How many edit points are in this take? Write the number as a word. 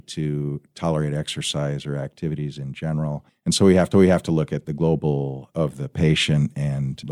two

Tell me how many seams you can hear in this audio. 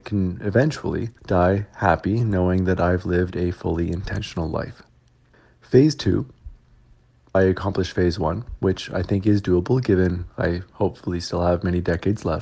three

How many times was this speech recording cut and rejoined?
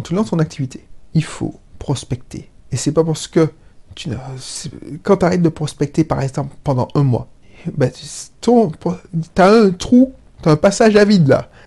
one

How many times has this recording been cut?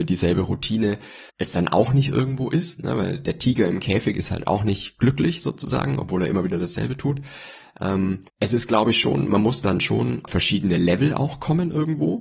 three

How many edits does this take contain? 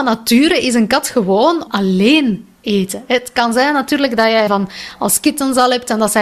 three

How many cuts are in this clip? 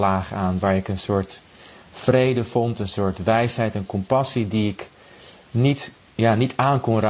zero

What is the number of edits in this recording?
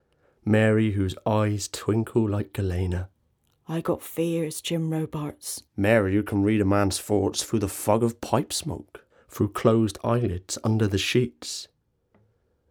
one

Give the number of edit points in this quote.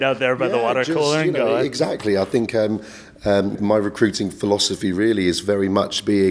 one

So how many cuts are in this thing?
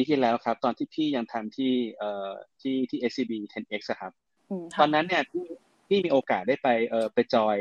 zero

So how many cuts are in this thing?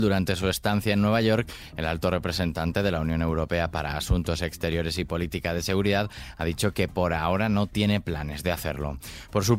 zero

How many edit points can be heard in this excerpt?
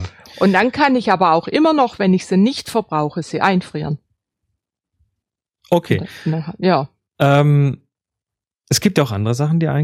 zero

